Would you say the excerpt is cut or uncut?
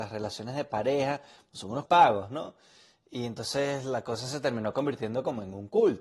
cut